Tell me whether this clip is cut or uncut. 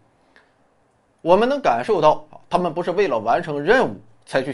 uncut